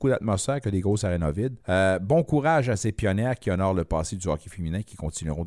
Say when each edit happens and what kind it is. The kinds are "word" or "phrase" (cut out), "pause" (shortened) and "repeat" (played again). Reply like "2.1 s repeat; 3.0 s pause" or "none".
1.6 s pause